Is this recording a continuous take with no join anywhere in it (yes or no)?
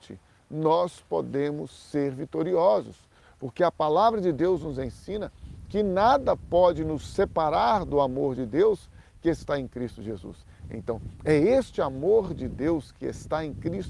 yes